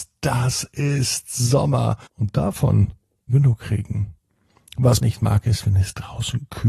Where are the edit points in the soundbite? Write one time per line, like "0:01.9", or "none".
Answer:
0:02.1
0:03.3
0:05.0